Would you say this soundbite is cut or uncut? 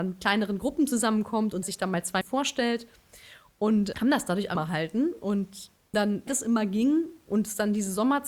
cut